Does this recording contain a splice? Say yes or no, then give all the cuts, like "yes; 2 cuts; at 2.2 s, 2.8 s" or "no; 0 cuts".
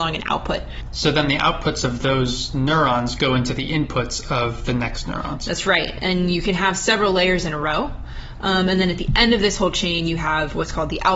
no; 0 cuts